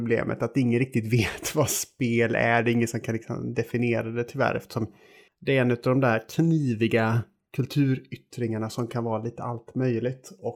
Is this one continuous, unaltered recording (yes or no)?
yes